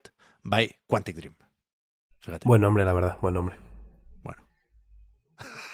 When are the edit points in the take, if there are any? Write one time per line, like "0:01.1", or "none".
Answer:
none